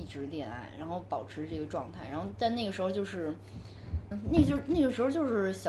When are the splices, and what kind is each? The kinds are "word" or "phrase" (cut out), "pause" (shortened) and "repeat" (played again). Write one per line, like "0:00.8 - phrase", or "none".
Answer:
0:04.1 - word